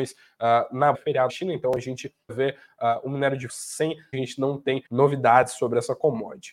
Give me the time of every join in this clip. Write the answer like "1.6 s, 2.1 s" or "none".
0.9 s, 1.3 s, 2.3 s, 3.5 s, 4.1 s, 4.9 s